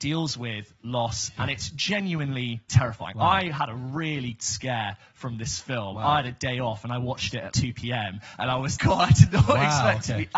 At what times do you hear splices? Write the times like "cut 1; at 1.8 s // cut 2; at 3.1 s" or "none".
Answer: cut 1; at 2.7 s // cut 2; at 4.4 s // cut 3; at 7.5 s // cut 4; at 8.8 s